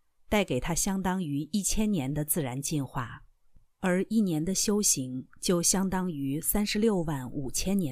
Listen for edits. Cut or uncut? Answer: cut